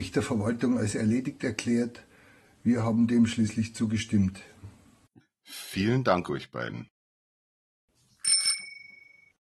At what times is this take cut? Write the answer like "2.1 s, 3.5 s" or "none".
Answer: none